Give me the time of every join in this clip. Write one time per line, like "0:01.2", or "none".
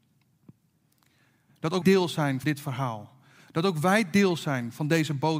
0:01.8
0:02.4